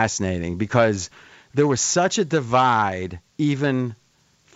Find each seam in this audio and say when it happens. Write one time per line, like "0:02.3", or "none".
none